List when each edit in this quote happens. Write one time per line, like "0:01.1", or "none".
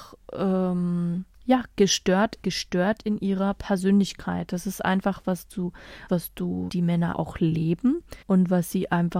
0:01.3
0:02.4
0:05.2
0:06.1
0:06.7
0:07.1
0:08.2